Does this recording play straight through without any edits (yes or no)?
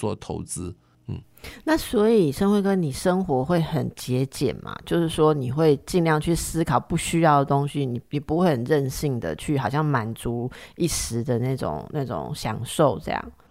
no